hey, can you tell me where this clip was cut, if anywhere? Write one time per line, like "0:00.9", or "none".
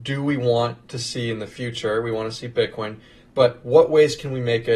none